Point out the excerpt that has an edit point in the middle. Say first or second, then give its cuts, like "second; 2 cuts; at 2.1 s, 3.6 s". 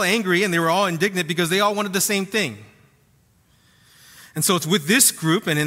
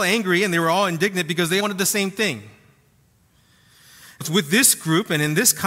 second; 2 cuts; at 1.6 s, 4.2 s